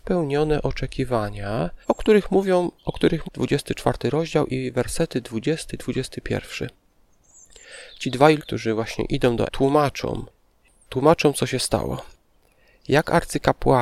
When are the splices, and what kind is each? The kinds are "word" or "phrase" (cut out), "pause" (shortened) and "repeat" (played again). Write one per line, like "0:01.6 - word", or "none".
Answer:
0:01.8 - pause
0:02.8 - pause
0:03.2 - phrase
0:08.4 - word
0:09.5 - word